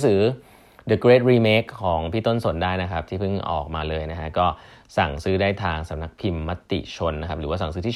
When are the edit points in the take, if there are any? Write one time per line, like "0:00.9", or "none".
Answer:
none